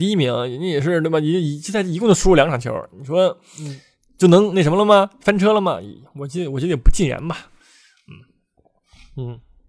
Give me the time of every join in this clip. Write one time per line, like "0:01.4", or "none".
none